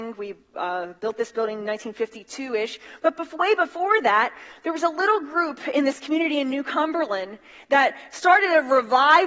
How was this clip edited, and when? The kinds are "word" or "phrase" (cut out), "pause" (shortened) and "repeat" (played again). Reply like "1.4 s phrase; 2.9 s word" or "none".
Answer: none